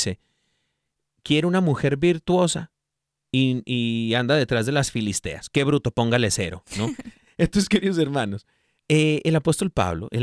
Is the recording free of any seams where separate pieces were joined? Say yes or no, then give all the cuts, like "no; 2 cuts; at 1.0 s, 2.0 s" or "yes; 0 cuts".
yes; 0 cuts